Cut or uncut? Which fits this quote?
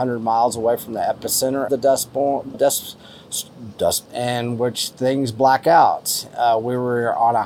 cut